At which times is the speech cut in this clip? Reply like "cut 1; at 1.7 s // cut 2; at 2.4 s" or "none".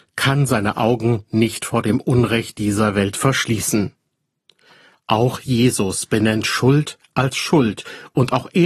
none